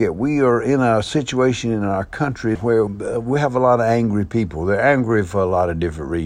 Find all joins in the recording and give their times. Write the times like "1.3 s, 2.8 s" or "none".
2.5 s, 2.9 s

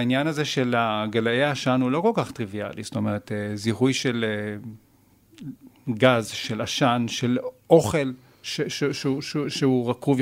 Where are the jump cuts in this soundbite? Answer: none

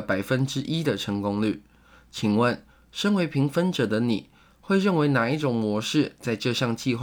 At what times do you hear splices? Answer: none

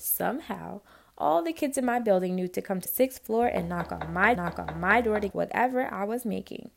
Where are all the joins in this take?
2.9 s, 4.4 s, 5.3 s

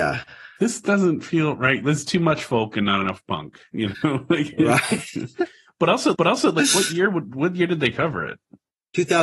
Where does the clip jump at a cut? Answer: 6.1 s

